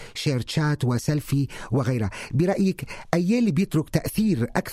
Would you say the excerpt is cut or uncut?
uncut